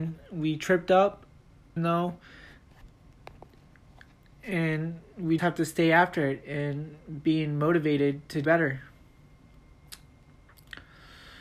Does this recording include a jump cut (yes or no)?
yes